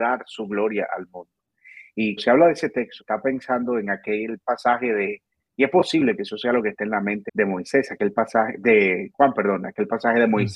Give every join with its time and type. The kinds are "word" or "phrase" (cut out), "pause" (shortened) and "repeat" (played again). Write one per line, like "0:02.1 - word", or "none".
0:02.2 - word
0:03.0 - word
0:07.3 - word